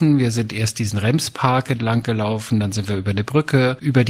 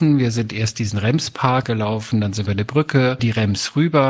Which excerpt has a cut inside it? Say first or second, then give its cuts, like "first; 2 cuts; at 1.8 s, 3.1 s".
second; 3 cuts; at 1.6 s, 2.5 s, 3.2 s